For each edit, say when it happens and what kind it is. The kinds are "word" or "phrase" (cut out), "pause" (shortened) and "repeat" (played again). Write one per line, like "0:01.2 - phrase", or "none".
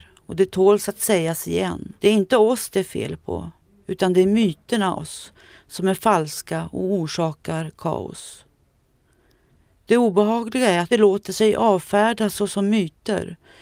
0:02.0 - pause
0:05.0 - word
0:10.9 - phrase